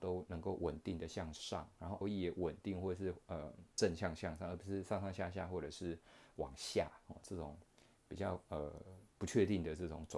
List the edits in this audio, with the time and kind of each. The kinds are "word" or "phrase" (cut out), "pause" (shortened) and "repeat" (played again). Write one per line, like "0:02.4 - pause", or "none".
0:02.0 - word

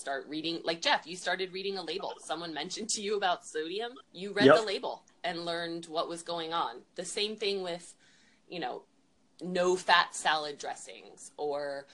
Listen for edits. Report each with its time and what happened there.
0:04.0 - pause

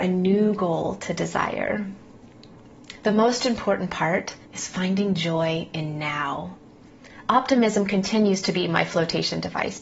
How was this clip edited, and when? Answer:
0:04.4 - pause

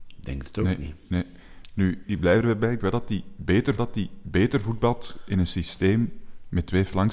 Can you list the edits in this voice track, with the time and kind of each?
0:02.0 - word
0:02.8 - word
0:03.8 - repeat

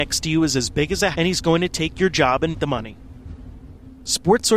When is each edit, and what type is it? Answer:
0:01.1 - word
0:02.5 - word

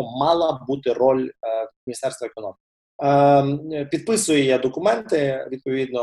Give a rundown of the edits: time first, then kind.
0:02.7 - pause

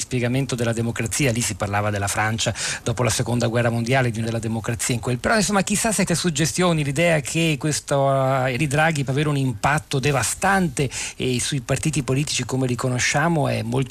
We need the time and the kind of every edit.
0:04.2 - word
0:05.2 - word
0:06.1 - word
0:08.6 - word
0:09.1 - word

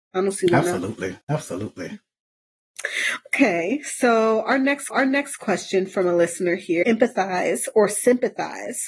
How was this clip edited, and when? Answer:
0:01.2 - pause
0:04.9 - repeat
0:06.8 - phrase

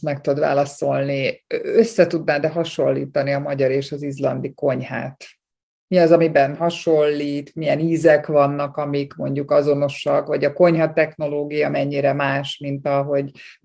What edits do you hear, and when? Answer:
none

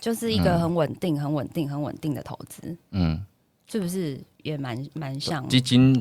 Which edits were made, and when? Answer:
none

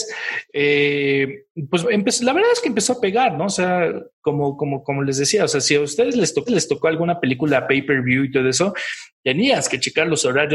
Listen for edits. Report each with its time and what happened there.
0:01.8 - word
0:06.5 - repeat

